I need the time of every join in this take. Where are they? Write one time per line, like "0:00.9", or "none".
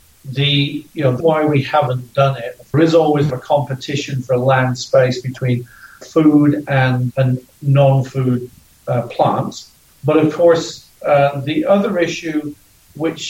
0:01.2
0:02.7
0:03.3
0:06.0
0:07.1
0:09.9